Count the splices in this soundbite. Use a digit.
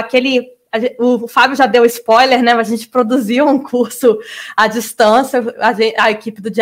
0